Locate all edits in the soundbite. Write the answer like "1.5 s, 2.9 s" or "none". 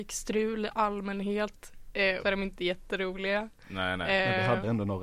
2.2 s